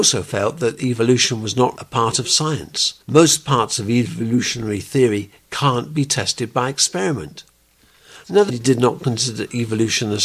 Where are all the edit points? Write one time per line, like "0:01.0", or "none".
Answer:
0:01.8
0:03.0
0:08.5